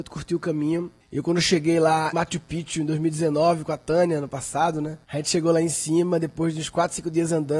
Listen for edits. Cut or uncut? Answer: cut